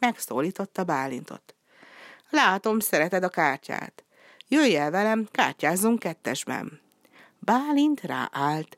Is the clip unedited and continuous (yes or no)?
yes